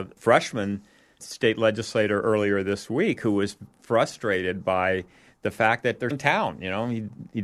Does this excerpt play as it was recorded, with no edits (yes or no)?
no